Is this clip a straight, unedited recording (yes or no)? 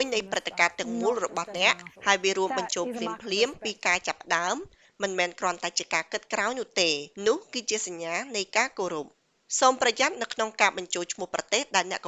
no